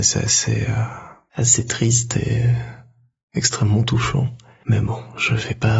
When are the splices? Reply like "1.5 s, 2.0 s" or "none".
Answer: none

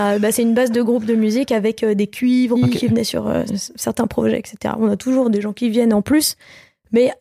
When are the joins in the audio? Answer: 2.6 s, 3.5 s

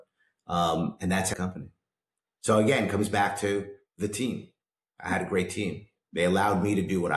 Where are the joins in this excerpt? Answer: 1.3 s

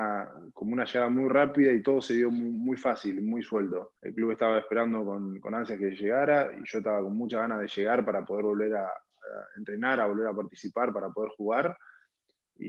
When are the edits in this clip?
4.0 s

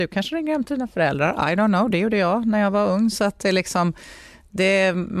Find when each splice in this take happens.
none

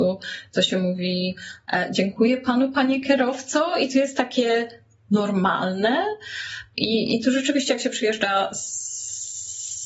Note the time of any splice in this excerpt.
none

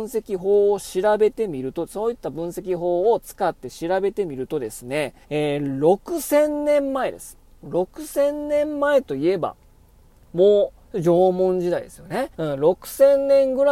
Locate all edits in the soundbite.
5.2 s, 10.8 s, 12.3 s

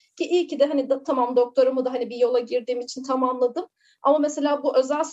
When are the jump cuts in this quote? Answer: none

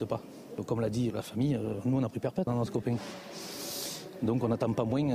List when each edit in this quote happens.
1.1 s, 2.5 s

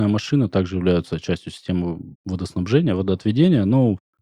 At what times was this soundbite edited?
2.1 s

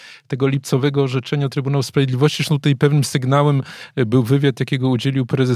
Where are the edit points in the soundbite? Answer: none

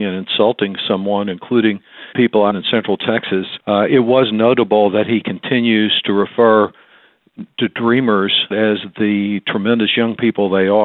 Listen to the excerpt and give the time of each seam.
2.1 s, 2.5 s, 3.6 s, 8.5 s

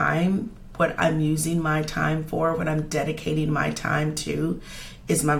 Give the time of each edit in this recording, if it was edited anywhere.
none

